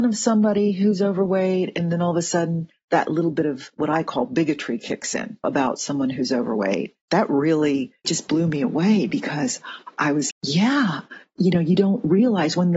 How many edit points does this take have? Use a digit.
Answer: 2